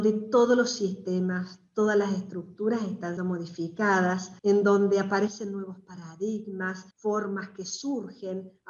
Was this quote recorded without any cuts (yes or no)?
no